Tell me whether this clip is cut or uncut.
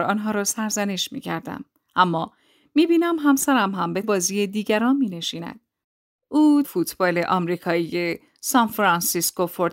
cut